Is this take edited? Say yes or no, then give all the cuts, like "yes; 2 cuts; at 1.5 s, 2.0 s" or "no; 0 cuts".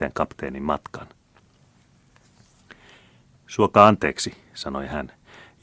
no; 0 cuts